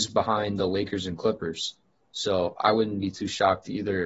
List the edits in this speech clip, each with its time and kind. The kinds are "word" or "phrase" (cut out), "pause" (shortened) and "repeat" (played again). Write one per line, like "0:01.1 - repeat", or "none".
none